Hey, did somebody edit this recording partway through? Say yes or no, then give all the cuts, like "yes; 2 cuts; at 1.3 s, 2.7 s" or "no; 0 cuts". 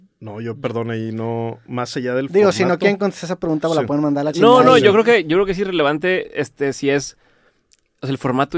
no; 0 cuts